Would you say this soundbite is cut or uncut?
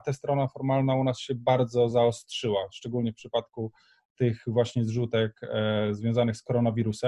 uncut